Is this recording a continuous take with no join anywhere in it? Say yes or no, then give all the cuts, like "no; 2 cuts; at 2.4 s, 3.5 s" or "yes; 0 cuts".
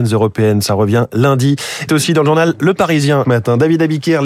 no; 2 cuts; at 1.9 s, 3.2 s